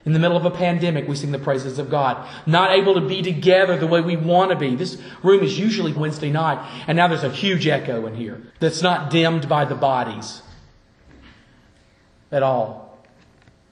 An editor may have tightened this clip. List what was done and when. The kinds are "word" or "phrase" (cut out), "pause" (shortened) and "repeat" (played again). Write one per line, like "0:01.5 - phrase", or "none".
0:05.9 - phrase
0:08.5 - pause